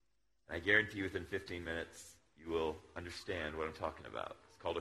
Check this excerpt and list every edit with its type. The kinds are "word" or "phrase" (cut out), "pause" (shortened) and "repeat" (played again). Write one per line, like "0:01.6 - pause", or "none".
none